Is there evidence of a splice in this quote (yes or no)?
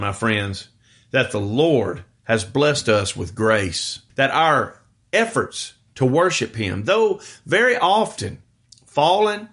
yes